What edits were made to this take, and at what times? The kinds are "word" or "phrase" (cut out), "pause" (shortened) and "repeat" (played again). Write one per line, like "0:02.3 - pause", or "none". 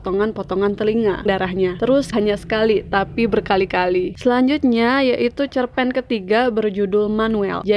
0:01.3 - phrase
0:02.1 - phrase